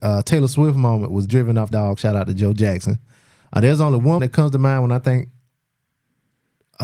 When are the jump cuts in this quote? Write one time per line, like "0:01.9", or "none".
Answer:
0:01.3
0:01.7
0:04.2